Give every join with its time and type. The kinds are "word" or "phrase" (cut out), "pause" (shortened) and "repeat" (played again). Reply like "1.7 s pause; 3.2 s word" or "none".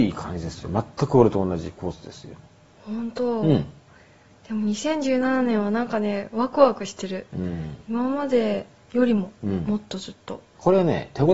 none